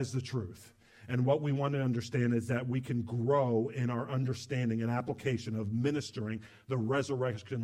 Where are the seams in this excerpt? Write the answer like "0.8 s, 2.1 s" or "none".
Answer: none